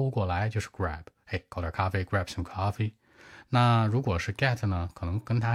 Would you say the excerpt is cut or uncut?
uncut